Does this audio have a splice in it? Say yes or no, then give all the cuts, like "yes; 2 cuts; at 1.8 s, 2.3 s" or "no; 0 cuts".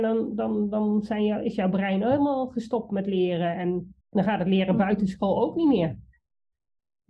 yes; 1 cut; at 4.0 s